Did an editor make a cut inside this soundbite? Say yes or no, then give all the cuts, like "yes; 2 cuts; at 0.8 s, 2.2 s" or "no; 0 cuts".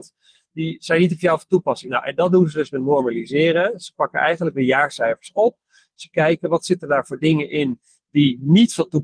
no; 0 cuts